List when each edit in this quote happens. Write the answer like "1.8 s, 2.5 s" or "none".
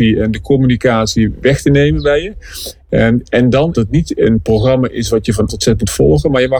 3.7 s, 5.5 s